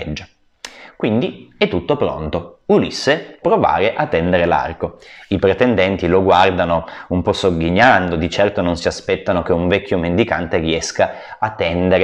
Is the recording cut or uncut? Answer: cut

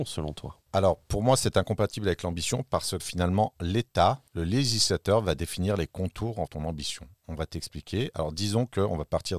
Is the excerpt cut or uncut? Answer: cut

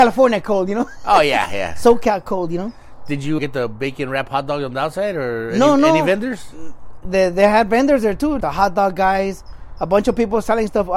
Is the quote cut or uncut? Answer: cut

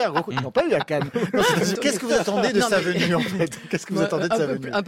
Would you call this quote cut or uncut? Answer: cut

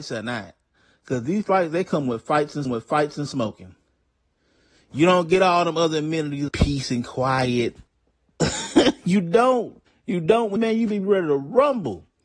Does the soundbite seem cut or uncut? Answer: cut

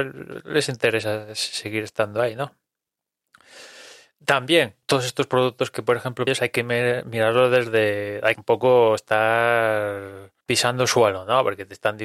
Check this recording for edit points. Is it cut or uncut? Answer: cut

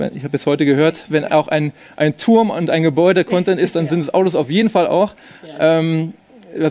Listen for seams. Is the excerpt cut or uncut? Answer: uncut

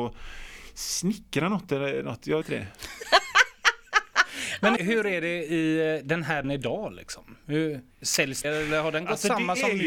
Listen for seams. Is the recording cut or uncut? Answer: cut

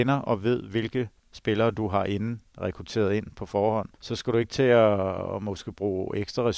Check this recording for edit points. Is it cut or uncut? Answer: cut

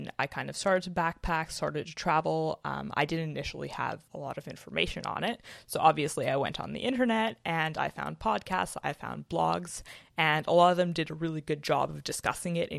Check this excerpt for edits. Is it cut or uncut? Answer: cut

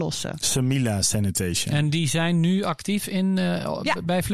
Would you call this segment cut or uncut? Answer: uncut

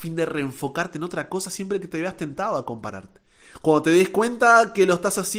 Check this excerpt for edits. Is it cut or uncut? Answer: uncut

